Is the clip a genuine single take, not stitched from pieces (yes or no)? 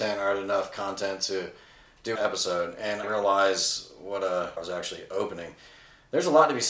no